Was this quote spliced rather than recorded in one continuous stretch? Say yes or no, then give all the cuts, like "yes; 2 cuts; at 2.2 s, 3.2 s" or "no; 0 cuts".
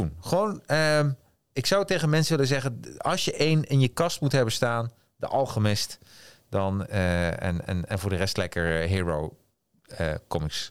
no; 0 cuts